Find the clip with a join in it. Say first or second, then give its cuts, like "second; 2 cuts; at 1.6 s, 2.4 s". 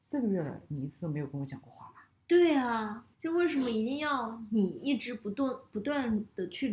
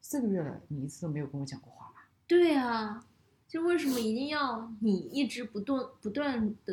first; 1 cut; at 3.1 s